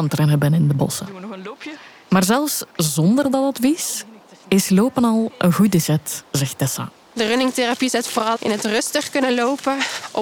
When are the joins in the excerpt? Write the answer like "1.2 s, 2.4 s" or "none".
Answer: 8.4 s